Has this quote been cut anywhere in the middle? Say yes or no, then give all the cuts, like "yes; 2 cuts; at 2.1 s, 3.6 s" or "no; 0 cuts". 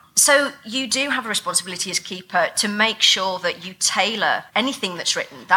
yes; 1 cut; at 4.5 s